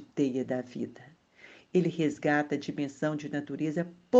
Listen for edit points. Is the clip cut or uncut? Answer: uncut